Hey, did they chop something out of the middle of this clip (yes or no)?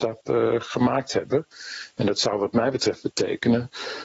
no